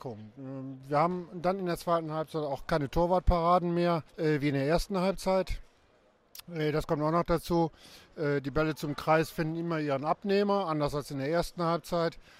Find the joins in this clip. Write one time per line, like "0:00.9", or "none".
0:04.1